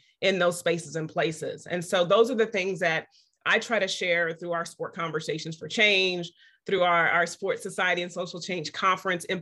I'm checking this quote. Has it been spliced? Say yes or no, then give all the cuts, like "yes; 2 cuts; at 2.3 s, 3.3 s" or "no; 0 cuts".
no; 0 cuts